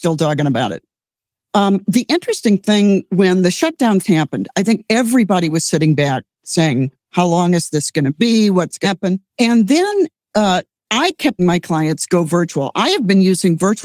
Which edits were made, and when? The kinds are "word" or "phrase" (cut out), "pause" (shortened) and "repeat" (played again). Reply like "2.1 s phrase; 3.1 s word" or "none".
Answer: 4.0 s word; 7.0 s pause; 8.8 s word; 9.3 s pause; 10.8 s pause; 11.4 s word